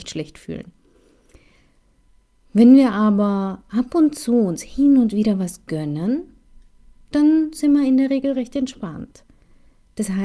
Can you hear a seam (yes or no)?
no